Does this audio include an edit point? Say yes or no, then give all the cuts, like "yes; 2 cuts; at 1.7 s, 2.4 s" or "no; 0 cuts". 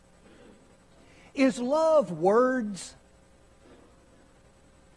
no; 0 cuts